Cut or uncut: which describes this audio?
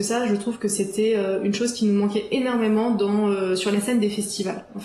uncut